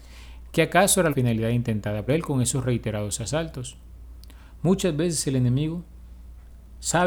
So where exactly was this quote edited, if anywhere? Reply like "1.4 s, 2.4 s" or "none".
1.1 s, 2.1 s